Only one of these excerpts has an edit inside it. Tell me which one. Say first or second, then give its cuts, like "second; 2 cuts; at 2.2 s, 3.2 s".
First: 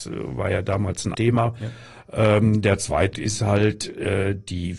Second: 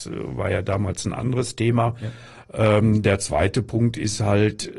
first; 2 cuts; at 1.1 s, 3.1 s